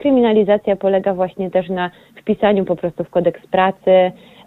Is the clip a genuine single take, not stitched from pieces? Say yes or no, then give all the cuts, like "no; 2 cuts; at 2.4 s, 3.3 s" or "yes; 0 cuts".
yes; 0 cuts